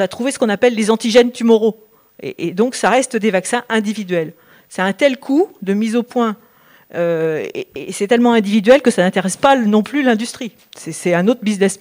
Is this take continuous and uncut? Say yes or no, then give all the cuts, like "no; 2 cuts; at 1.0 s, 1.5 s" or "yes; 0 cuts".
yes; 0 cuts